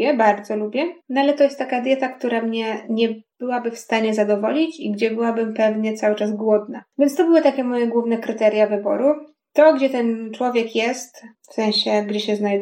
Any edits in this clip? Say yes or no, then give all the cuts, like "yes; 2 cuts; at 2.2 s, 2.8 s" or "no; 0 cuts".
yes; 2 cuts; at 1.0 s, 3.3 s